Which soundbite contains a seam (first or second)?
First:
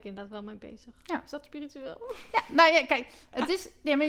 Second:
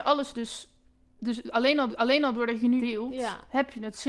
second